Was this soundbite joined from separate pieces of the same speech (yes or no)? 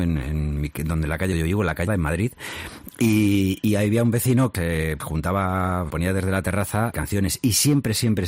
yes